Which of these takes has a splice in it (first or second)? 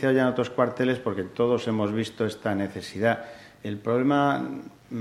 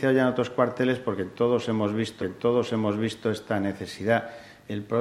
second